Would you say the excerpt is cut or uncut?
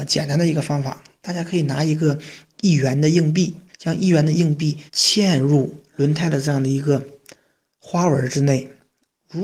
cut